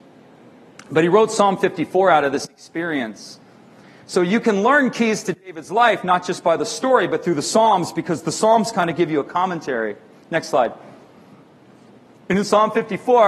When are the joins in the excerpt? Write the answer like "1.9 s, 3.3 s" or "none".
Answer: none